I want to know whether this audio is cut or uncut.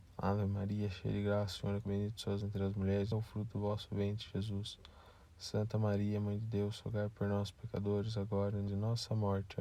cut